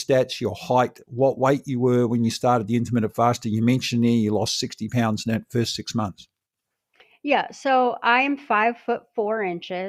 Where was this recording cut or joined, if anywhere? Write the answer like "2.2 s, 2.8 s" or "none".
none